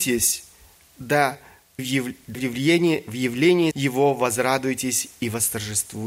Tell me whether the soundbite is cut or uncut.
cut